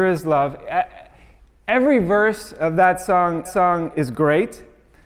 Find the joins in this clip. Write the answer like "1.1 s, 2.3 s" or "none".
3.5 s